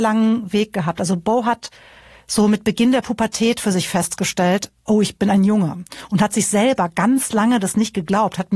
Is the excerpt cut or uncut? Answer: uncut